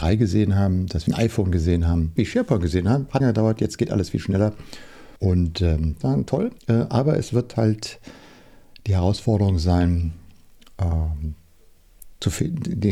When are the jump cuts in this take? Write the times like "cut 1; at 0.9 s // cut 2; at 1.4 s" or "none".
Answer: cut 1; at 1.1 s // cut 2; at 2.2 s // cut 3; at 3.2 s // cut 4; at 5.2 s // cut 5; at 6.0 s // cut 6; at 6.6 s